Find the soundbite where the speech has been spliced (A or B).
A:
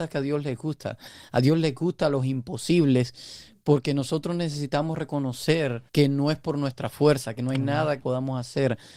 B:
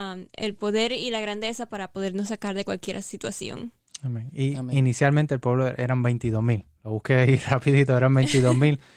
A